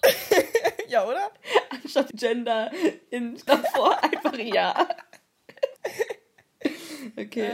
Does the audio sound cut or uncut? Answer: cut